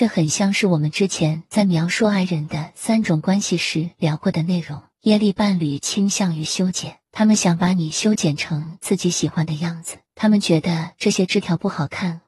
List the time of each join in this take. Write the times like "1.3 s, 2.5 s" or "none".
4.9 s, 7.0 s, 10.1 s